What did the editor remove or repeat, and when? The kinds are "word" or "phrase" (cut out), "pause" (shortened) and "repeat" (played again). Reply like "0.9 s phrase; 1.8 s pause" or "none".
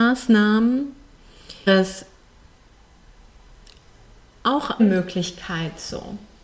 1.7 s word; 4.8 s word